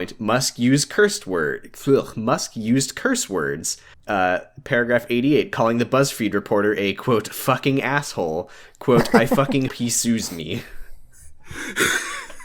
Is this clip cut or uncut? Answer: cut